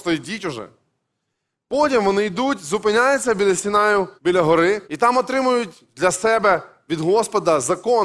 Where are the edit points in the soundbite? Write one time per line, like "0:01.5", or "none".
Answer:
0:04.2
0:04.8